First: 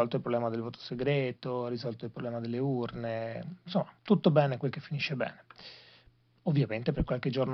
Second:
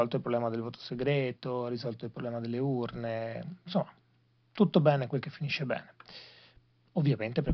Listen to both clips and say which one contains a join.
first; 1 cut; at 4.0 s

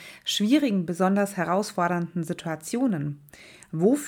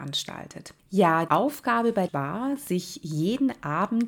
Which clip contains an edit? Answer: second; 2 cuts; at 1.3 s, 2.1 s

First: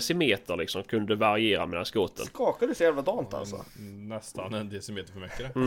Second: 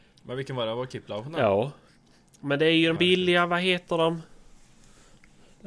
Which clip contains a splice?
second; 2 cuts; at 1.9 s, 3.0 s

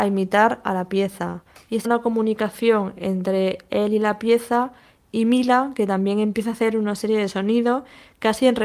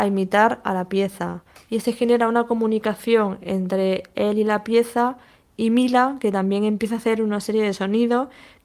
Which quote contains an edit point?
first; 1 cut; at 1.8 s

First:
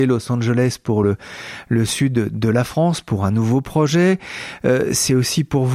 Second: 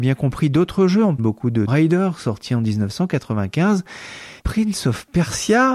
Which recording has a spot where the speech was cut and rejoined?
second; 3 cuts; at 1.2 s, 1.7 s, 4.4 s

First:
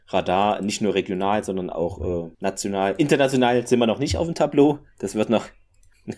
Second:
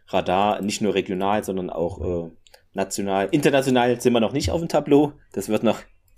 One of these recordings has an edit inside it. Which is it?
first; 1 cut; at 2.3 s

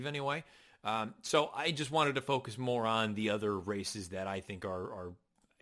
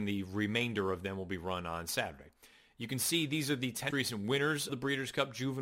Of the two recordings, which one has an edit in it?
second; 2 cuts; at 3.9 s, 4.7 s

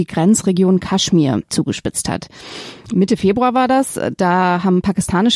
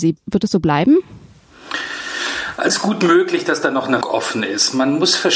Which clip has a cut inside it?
second; 2 cuts; at 2.7 s, 4.0 s

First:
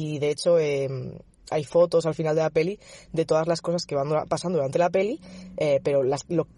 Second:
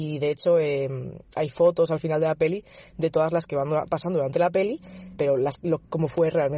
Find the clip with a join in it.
second; 3 cuts; at 1.2 s, 3.5 s, 5.2 s

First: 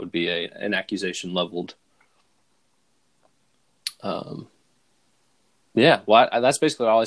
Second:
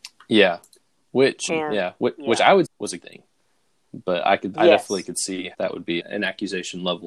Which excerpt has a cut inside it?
second; 6 cuts; at 1.5 s, 2.6 s, 3.0 s, 4.5 s, 5.5 s, 6.0 s

